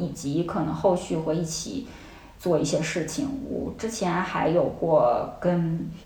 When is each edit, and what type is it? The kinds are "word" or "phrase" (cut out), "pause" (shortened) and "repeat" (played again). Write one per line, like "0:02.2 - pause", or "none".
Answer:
none